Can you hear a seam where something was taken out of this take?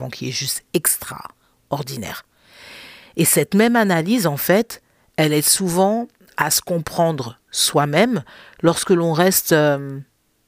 no; 0 cuts

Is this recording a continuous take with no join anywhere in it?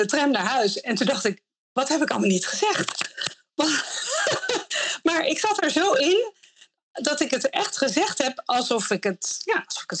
yes; 0 cuts

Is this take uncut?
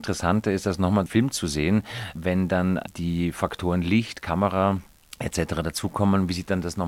no; 1 cut; at 1.1 s

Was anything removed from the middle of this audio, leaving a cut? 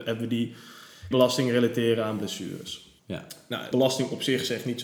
yes; 3 cuts; at 1.1 s, 3.0 s, 3.7 s

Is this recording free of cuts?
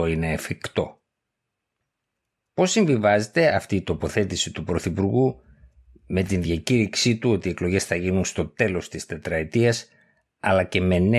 yes; 0 cuts

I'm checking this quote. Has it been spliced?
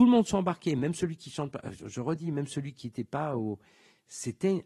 no; 0 cuts

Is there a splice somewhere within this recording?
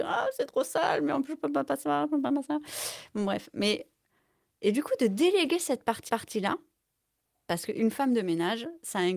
yes; 1 cut; at 6.1 s

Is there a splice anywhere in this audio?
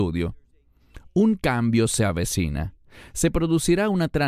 no; 0 cuts

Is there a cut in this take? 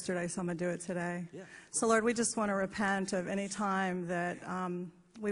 no; 0 cuts

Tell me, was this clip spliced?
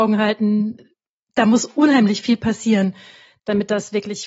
no; 0 cuts

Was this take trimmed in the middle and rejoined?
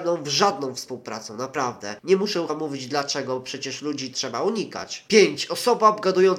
yes; 2 cuts; at 2.5 s, 4.1 s

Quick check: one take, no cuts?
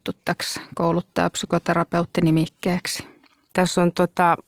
yes; 0 cuts

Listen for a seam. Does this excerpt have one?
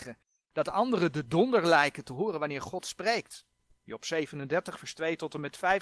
no; 0 cuts

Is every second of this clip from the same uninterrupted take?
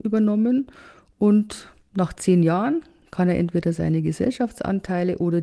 no; 1 cut; at 1.8 s

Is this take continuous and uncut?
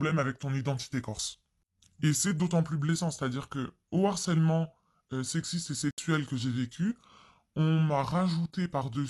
yes; 0 cuts

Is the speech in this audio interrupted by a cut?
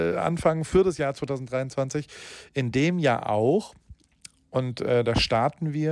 no; 0 cuts

